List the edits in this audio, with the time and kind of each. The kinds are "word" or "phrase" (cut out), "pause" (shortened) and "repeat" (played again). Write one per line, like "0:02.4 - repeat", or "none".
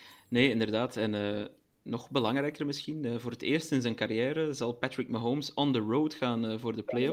none